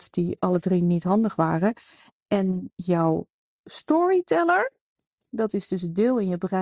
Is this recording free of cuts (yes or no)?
yes